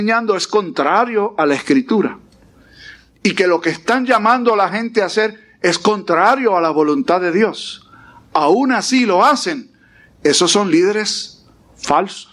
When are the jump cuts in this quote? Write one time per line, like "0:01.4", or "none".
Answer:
none